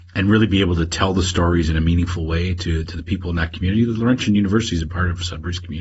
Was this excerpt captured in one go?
no; 1 cut; at 4.9 s

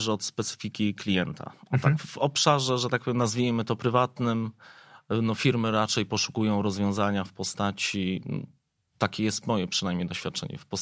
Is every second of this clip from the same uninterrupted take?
yes; 0 cuts

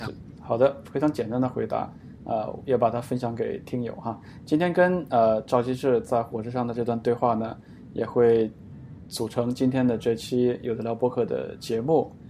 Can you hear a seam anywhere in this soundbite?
no; 0 cuts

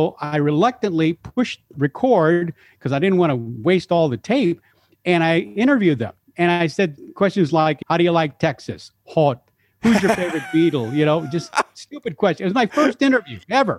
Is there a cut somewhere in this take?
no; 0 cuts

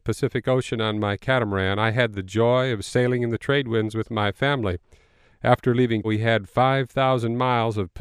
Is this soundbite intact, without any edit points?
no; 1 cut; at 6.0 s

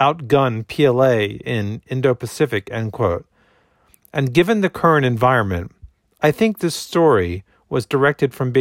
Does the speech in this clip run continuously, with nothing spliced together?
yes; 0 cuts

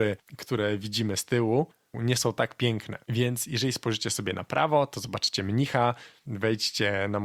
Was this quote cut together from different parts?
yes; 1 cut; at 3.0 s

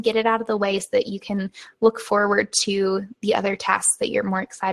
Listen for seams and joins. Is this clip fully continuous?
yes; 0 cuts

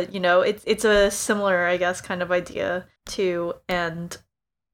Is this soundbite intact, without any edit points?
no; 1 cut; at 3.0 s

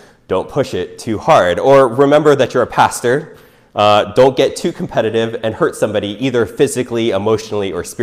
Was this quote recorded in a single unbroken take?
yes; 0 cuts

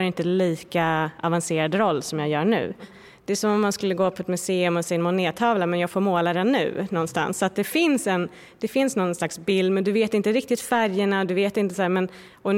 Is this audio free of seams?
yes; 0 cuts

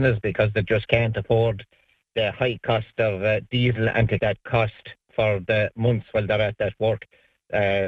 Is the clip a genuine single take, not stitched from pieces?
no; 1 cut; at 4.2 s

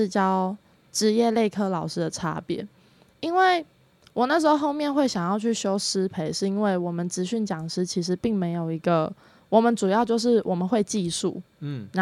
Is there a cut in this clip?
no; 0 cuts

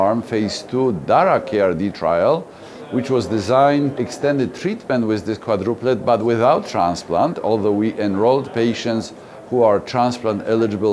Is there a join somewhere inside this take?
yes; 1 cut; at 4.0 s

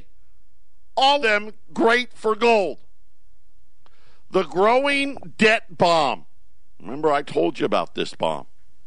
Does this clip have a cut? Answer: yes; 1 cut; at 1.2 s

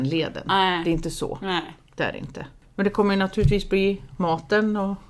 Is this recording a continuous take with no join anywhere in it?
no; 2 cuts; at 1.8 s, 2.6 s

